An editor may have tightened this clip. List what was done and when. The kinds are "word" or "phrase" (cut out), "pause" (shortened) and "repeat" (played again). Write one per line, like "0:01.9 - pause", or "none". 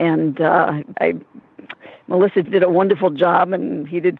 0:00.9 - word
0:02.4 - word

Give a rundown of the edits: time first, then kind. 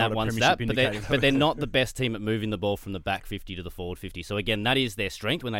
none

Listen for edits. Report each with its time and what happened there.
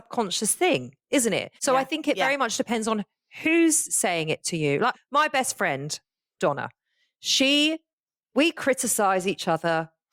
0:01.6 - pause
0:04.9 - word

